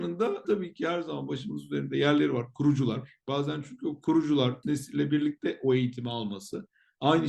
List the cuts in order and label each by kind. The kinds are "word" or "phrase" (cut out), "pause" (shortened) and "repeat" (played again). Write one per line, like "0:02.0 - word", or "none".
0:04.6 - word